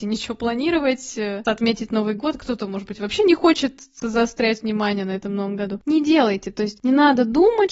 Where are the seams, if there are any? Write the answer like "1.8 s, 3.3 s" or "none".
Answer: 1.4 s, 4.0 s